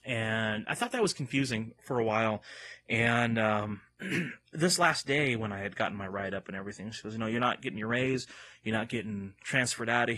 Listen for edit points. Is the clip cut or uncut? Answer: uncut